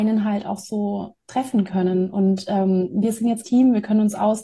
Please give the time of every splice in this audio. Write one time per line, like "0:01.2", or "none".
0:03.4